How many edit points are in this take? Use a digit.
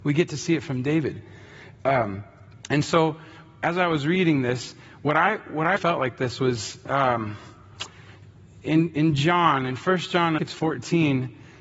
3